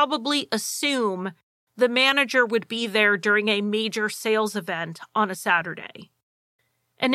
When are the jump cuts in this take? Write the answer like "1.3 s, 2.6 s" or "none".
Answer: none